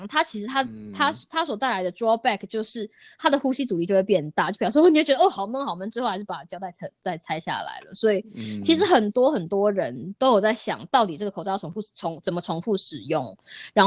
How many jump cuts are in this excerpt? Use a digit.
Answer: 0